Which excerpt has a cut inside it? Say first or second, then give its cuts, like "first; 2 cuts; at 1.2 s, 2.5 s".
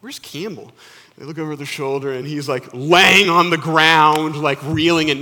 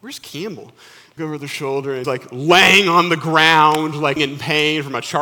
second; 3 cuts; at 1.2 s, 2.0 s, 4.2 s